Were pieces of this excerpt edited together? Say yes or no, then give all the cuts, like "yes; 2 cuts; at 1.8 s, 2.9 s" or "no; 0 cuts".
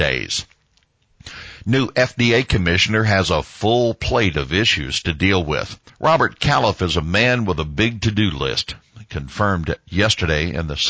yes; 1 cut; at 5.9 s